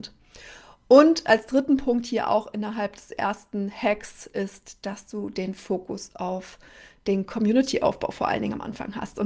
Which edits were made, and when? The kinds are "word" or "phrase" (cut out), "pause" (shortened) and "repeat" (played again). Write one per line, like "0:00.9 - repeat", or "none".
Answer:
none